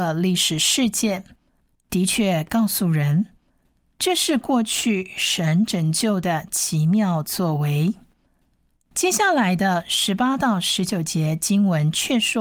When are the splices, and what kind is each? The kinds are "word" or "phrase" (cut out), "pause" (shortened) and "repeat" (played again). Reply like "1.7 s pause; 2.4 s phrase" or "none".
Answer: none